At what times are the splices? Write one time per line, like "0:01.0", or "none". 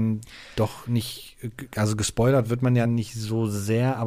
none